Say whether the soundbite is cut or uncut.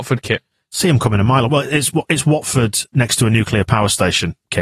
uncut